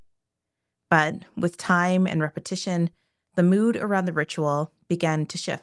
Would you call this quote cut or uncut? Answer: uncut